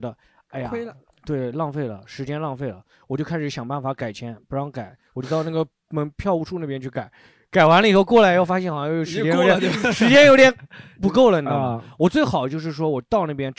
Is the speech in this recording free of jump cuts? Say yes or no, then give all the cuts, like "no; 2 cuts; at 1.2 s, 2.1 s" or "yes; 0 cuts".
yes; 0 cuts